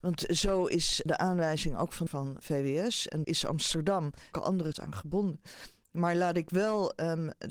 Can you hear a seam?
yes; 6 cuts; at 1.1 s, 2.1 s, 2.4 s, 3.2 s, 4.3 s, 4.7 s

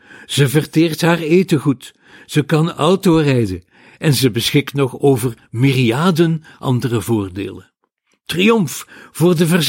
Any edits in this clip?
no; 0 cuts

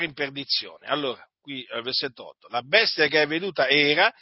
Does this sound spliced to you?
no; 0 cuts

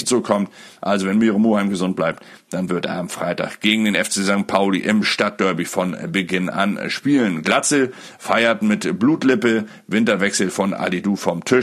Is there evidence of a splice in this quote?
no; 0 cuts

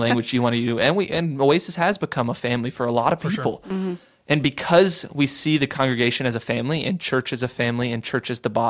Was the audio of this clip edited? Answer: no; 0 cuts

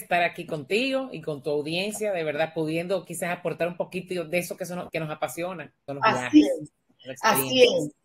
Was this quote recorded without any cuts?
no; 2 cuts; at 4.9 s, 5.9 s

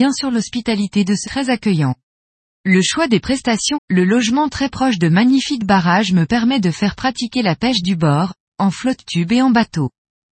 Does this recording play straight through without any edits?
no; 3 cuts; at 1.2 s, 2.1 s, 3.7 s

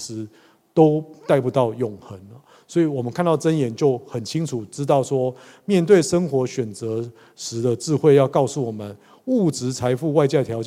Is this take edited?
no; 0 cuts

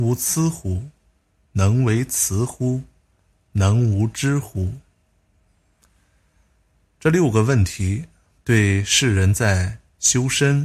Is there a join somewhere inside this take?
no; 0 cuts

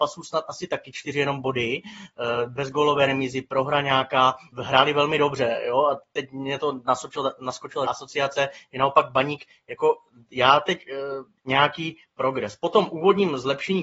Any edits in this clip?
yes; 3 cuts; at 4.5 s, 7.9 s, 11.4 s

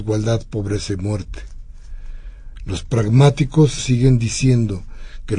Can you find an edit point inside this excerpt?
yes; 1 cut; at 3.8 s

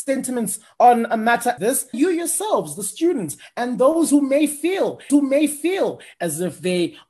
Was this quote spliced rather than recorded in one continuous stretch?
yes; 3 cuts; at 1.6 s, 1.9 s, 5.1 s

